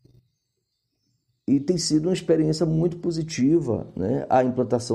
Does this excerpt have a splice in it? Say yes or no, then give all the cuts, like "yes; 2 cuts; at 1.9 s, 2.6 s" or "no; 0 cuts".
no; 0 cuts